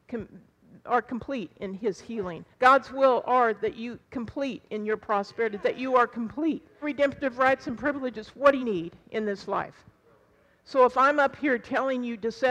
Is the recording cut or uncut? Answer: cut